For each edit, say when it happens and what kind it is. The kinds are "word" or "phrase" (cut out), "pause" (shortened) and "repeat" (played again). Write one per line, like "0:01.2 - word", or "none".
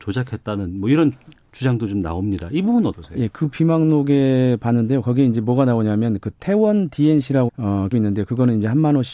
0:02.9 - word
0:07.5 - word
0:07.9 - word